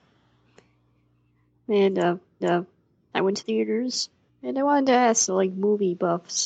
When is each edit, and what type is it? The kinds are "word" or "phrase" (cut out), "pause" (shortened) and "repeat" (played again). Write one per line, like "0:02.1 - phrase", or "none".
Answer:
0:02.4 - repeat
0:03.4 - phrase
0:04.3 - pause
0:05.3 - phrase